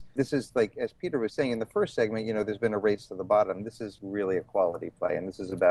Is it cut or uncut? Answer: uncut